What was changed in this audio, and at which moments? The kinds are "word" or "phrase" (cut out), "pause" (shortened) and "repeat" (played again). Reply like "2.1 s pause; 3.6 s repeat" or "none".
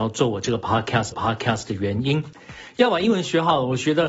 1.1 s repeat